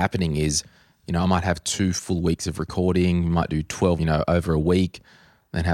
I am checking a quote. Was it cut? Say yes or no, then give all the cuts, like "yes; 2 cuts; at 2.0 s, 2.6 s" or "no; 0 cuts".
yes; 1 cut; at 4.0 s